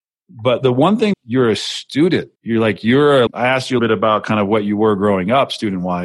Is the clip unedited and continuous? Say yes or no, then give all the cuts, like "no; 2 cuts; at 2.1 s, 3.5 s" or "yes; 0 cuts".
no; 4 cuts; at 1.1 s, 2.4 s, 3.3 s, 3.8 s